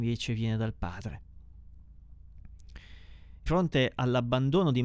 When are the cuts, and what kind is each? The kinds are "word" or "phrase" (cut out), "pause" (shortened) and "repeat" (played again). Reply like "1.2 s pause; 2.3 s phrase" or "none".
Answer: 3.5 s word

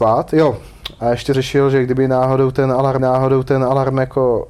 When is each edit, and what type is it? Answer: 1.3 s word; 3.0 s repeat

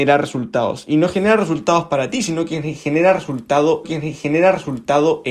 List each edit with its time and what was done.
3.8 s repeat

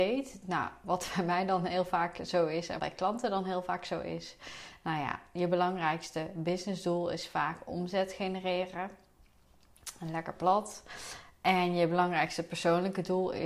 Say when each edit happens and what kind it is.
2.8 s word

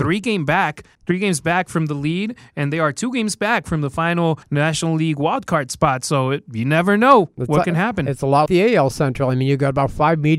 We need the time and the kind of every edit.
0.9 s pause; 4.4 s pause; 8.5 s word

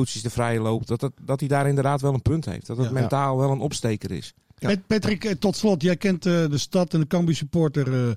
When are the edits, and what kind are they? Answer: none

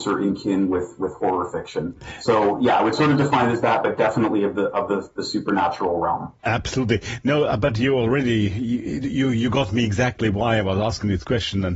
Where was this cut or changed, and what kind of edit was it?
6.4 s pause

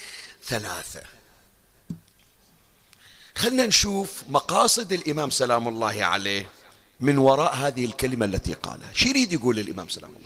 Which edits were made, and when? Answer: 6.7 s pause

